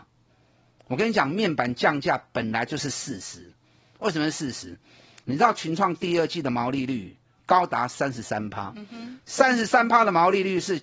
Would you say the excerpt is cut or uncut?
uncut